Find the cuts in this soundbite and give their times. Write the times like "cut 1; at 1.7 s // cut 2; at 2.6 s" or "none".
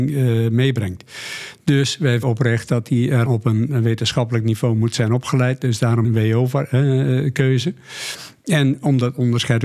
cut 1; at 2.2 s // cut 2; at 3.2 s // cut 3; at 6.0 s